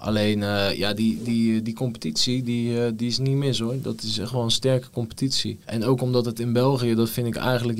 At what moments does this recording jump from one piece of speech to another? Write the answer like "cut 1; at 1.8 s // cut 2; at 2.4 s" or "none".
cut 1; at 5.6 s